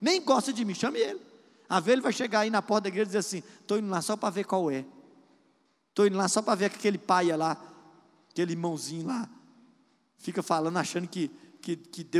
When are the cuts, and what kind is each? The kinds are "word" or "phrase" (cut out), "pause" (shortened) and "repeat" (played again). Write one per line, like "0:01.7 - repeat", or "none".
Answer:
none